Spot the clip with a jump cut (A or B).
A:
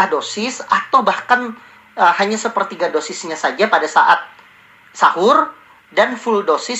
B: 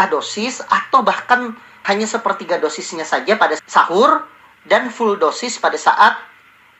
B